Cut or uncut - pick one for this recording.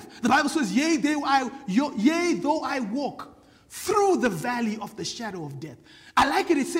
uncut